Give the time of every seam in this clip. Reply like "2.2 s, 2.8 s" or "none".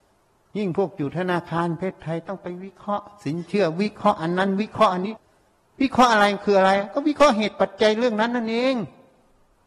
none